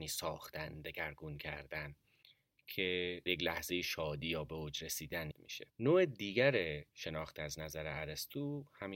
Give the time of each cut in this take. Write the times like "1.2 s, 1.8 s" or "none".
3.3 s, 5.3 s, 5.7 s, 6.9 s